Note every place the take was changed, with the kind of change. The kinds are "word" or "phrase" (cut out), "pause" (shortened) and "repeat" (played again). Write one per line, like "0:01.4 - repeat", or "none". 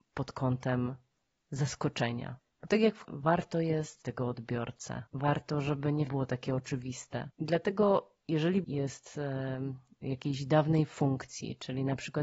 0:02.5 - pause
0:03.0 - word
0:04.0 - word
0:05.1 - pause
0:06.1 - word
0:07.3 - pause
0:08.6 - word

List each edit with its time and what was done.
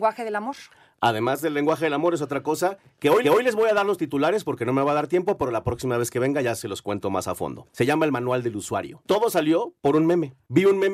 0:03.2 - repeat

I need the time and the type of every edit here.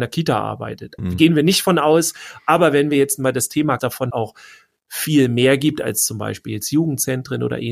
0:01.0 - word
0:03.8 - phrase
0:04.1 - word

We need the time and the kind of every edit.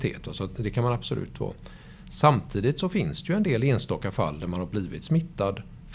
none

